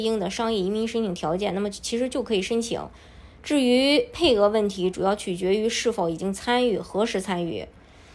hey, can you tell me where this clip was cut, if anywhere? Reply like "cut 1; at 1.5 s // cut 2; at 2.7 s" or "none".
none